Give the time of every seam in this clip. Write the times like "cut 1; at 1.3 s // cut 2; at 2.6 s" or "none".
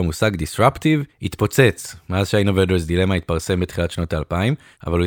none

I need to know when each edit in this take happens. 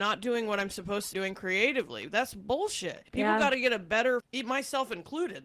cut 1; at 1.1 s // cut 2; at 3.1 s // cut 3; at 4.2 s

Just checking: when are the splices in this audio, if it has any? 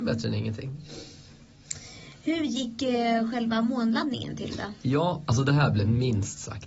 none

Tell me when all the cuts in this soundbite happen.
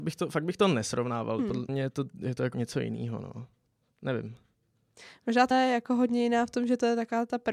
cut 1; at 1.7 s // cut 2; at 2.5 s // cut 3; at 5.5 s

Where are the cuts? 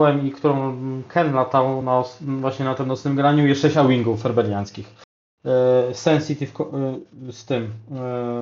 none

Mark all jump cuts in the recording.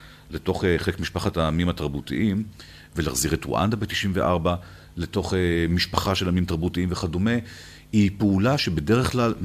none

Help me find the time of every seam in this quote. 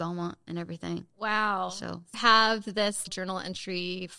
cut 1; at 2.1 s // cut 2; at 3.1 s

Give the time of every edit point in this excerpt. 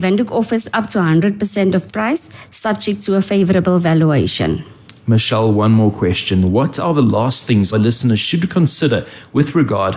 cut 1; at 1.9 s // cut 2; at 7.7 s

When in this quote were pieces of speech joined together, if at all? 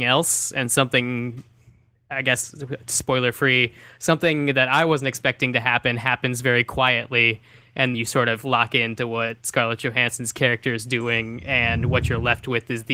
cut 1; at 7.9 s

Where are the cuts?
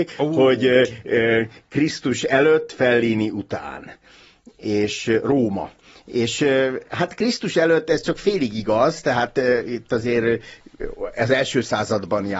none

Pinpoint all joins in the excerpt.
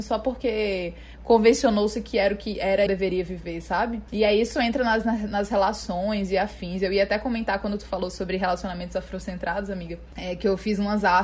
cut 1; at 2.9 s

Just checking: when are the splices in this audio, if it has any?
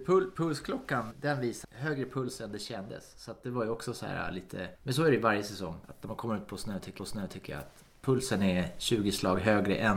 cut 1; at 1.1 s // cut 2; at 1.6 s // cut 3; at 4.7 s // cut 4; at 5.8 s // cut 5; at 7.0 s

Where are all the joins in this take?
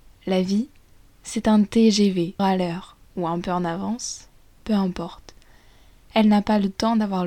cut 1; at 2.4 s

